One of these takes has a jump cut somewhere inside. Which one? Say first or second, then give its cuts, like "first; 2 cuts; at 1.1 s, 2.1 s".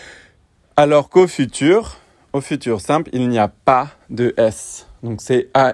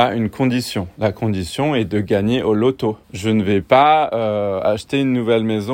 second; 1 cut; at 3.0 s